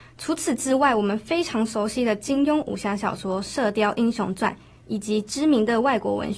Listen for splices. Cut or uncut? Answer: uncut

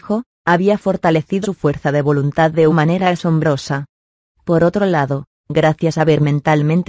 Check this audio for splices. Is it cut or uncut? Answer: cut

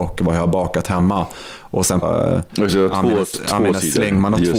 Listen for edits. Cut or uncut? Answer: cut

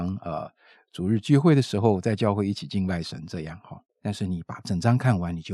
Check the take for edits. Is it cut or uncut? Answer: cut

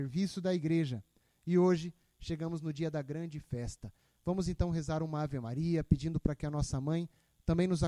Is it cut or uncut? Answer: uncut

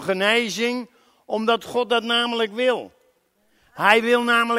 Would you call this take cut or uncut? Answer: uncut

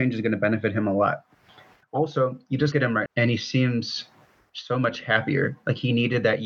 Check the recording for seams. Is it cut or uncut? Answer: cut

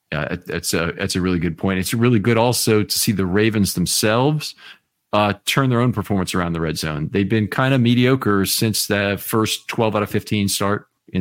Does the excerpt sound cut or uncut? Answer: uncut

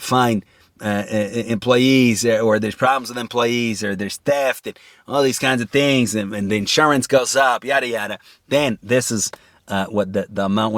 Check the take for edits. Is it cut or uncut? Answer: uncut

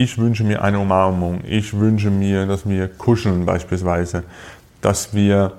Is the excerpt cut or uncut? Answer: uncut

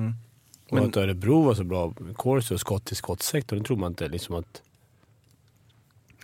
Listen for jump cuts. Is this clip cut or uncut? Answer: uncut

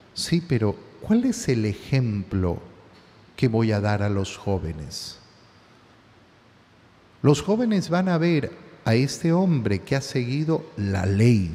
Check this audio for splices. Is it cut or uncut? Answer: uncut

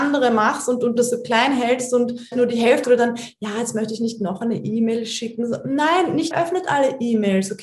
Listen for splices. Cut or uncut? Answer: cut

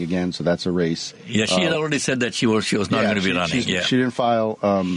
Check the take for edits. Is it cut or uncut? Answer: uncut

